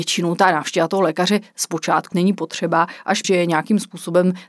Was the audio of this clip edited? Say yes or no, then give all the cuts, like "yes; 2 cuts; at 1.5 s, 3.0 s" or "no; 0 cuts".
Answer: yes; 2 cuts; at 2.1 s, 3.2 s